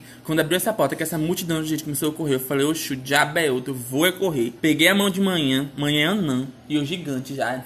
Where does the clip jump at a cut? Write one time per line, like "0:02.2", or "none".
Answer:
0:04.6
0:06.6